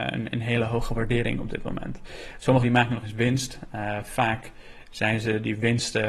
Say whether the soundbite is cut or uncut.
cut